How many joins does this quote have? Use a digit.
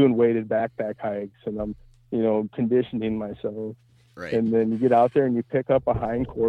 0